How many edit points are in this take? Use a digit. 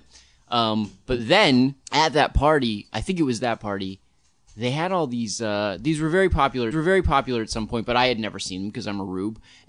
2